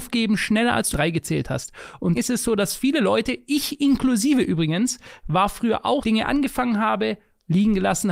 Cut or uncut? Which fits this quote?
cut